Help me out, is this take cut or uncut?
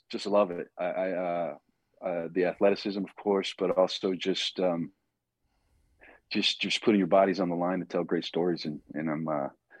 uncut